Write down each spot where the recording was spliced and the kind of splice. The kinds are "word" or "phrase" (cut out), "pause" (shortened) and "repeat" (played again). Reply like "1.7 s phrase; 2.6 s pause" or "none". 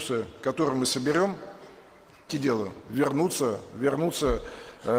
2.3 s word